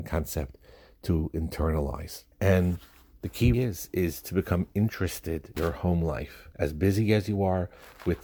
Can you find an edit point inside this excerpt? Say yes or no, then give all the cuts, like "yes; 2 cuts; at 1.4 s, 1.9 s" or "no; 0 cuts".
yes; 4 cuts; at 2.3 s, 3.5 s, 5.6 s, 6.5 s